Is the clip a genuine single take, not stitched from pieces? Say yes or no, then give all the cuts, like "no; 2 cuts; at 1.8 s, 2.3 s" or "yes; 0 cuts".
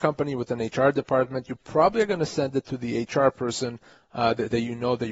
yes; 0 cuts